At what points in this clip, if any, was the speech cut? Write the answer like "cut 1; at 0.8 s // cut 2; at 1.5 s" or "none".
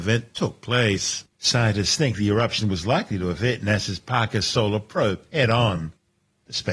cut 1; at 1.3 s